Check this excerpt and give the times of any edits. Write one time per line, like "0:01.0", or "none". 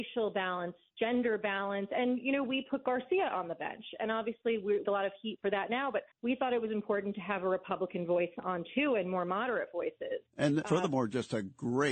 0:04.8
0:06.1
0:10.6